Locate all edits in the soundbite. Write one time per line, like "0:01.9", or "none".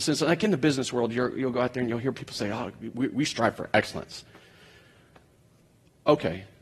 none